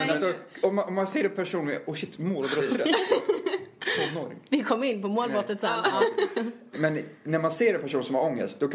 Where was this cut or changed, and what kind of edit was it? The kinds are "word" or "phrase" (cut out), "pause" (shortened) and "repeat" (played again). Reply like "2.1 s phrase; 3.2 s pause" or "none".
6.7 s word

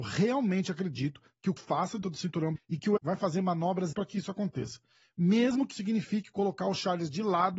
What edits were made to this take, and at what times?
1.6 s word; 2.0 s word; 2.6 s word; 3.0 s word; 3.9 s word; 5.7 s word

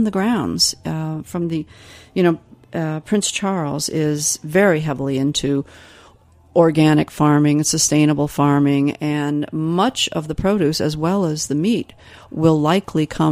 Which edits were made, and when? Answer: none

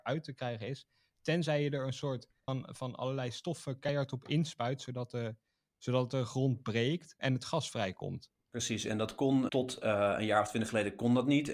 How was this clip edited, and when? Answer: 2.5 s word; 7.2 s word; 8.4 s pause; 9.5 s word

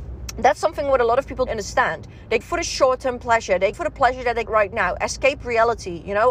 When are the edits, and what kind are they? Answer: 1.5 s word; 2.4 s word; 3.7 s word; 4.5 s word

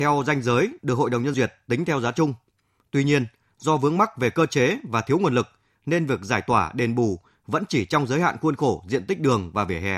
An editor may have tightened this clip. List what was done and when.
1.3 s word

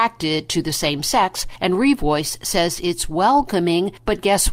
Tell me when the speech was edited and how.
none

